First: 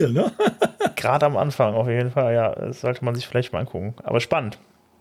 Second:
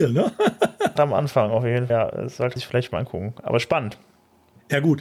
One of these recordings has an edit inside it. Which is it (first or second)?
second